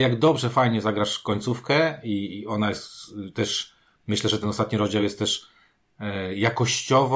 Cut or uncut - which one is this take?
uncut